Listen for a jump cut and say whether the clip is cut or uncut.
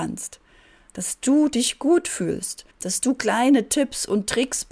cut